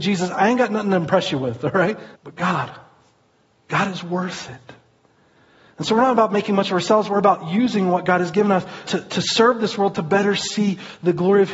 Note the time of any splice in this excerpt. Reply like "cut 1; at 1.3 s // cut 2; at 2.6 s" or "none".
cut 1; at 2.2 s // cut 2; at 8.9 s

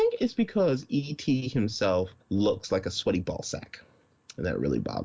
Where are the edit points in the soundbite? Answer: cut 1; at 2.2 s

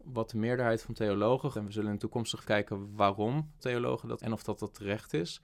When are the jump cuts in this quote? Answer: cut 1; at 1.5 s // cut 2; at 2.4 s // cut 3; at 3.6 s // cut 4; at 4.2 s

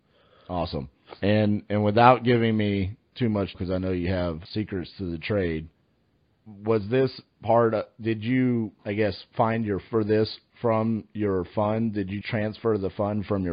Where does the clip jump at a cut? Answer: cut 1; at 1.1 s // cut 2; at 3.5 s // cut 3; at 4.5 s // cut 4; at 6.4 s // cut 5; at 8.8 s // cut 6; at 9.9 s // cut 7; at 12.2 s

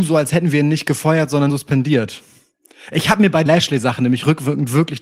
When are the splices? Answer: cut 1; at 1.5 s // cut 2; at 3.5 s

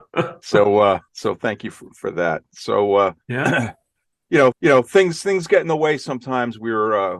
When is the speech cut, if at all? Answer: cut 1; at 1.1 s // cut 2; at 3.2 s // cut 3; at 4.5 s

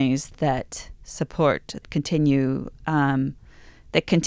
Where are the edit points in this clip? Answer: cut 1; at 1.8 s

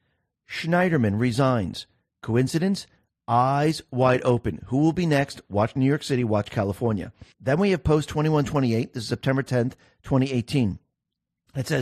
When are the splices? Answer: cut 1; at 7.3 s

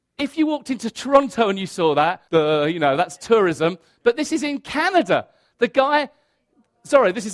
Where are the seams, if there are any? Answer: cut 1; at 2.3 s

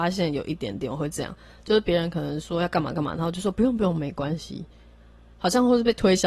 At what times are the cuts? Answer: none

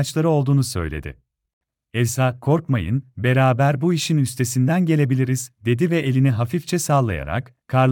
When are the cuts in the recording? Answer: cut 1; at 1.6 s

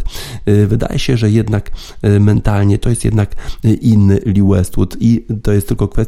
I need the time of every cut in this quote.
none

